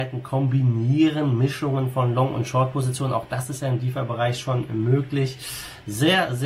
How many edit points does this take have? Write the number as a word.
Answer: zero